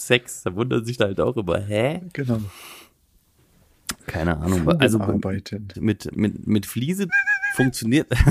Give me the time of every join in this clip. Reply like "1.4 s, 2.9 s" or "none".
1.0 s, 5.7 s, 6.1 s, 7.1 s